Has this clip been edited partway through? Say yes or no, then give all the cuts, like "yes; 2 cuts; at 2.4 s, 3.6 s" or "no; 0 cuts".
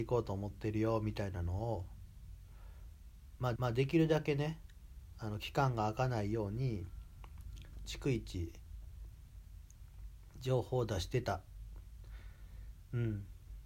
yes; 1 cut; at 3.6 s